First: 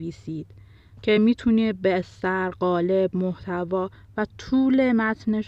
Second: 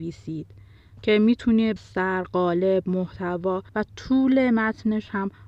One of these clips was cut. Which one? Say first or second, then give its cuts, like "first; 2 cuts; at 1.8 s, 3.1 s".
second; 2 cuts; at 1.8 s, 3.7 s